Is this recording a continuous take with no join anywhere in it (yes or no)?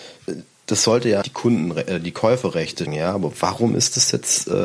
no